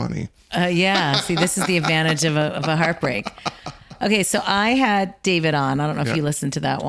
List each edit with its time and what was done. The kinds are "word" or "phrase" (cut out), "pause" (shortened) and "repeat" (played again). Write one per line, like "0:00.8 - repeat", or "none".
none